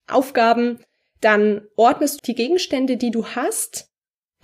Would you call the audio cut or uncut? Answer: cut